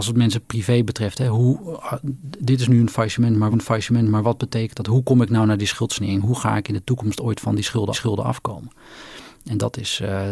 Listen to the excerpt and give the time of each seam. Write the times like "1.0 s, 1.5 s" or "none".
3.5 s, 7.9 s